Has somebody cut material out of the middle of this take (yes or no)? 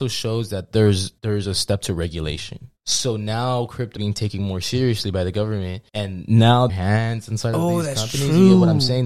yes